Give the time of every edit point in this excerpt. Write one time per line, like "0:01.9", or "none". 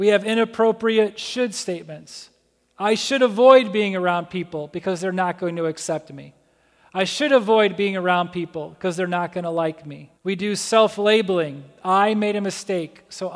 0:10.2